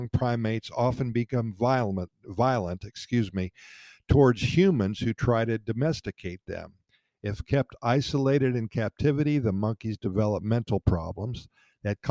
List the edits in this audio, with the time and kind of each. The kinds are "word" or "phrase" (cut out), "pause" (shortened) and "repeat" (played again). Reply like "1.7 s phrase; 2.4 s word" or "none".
none